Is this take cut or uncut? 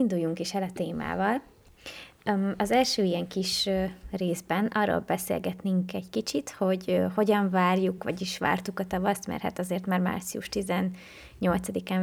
uncut